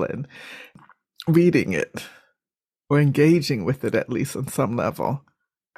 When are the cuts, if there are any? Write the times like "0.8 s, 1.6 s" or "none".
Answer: none